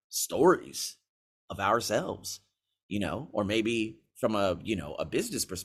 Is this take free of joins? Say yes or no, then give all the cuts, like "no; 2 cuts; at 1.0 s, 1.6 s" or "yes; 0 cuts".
yes; 0 cuts